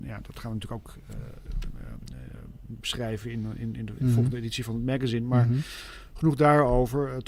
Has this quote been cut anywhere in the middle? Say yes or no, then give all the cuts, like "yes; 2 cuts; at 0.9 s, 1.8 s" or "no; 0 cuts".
no; 0 cuts